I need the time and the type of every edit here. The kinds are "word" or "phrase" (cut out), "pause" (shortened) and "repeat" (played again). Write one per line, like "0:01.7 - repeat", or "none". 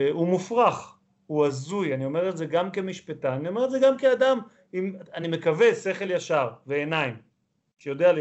none

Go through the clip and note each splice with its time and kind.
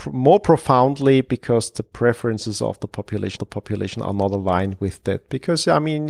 0:03.4 - repeat

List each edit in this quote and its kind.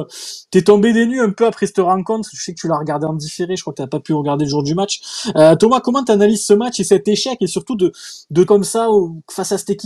0:08.5 - word

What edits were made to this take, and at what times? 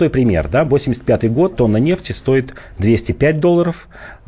0:01.5 - word

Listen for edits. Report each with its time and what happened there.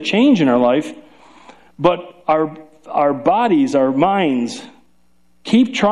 none

